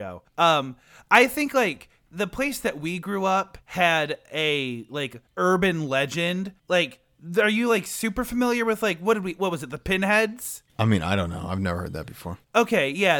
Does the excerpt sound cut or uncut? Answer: cut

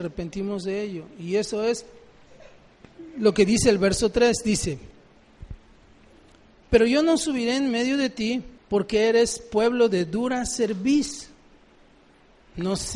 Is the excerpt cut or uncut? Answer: cut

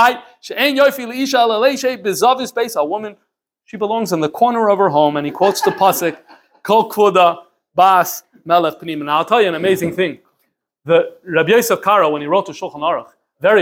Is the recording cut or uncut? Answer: uncut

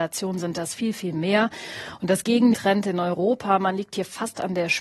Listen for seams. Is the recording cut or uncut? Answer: cut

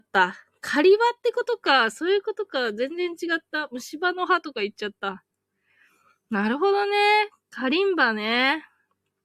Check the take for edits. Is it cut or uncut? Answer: uncut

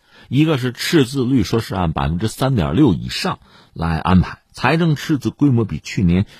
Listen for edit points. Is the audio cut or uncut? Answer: cut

